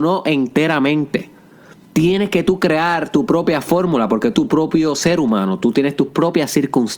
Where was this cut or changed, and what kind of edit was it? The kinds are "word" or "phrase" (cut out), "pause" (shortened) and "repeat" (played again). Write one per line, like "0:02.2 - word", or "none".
0:04.3 - word